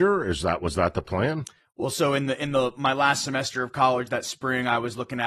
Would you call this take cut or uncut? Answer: uncut